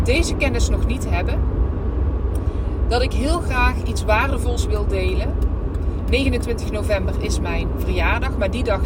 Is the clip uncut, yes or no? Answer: yes